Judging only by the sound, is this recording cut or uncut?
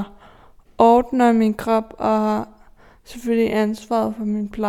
uncut